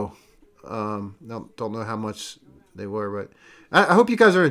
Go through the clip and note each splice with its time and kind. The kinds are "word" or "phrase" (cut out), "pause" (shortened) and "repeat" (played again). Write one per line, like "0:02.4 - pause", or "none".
none